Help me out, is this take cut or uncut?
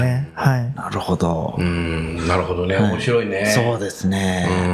uncut